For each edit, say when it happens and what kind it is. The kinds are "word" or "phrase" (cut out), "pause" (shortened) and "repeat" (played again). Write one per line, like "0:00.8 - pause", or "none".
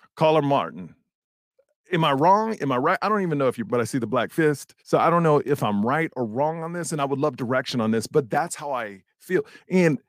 0:01.2 - pause
0:03.7 - word
0:04.8 - pause